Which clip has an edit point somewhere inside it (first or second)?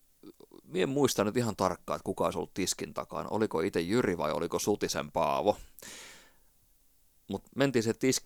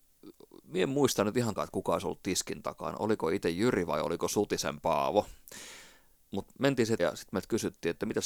second